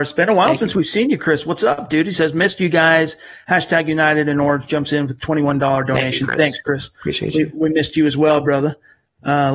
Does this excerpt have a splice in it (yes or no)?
no